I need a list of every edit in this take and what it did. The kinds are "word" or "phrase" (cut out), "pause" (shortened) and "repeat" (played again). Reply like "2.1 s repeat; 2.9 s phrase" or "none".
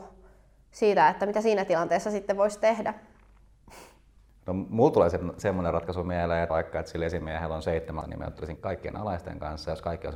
6.5 s word; 8.0 s word; 8.6 s word